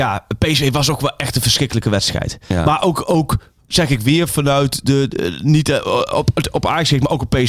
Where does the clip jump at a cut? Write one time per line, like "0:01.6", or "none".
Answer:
none